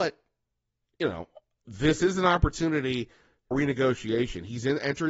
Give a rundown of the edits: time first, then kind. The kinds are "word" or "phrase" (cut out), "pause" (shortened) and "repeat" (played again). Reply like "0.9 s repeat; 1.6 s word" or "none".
3.5 s word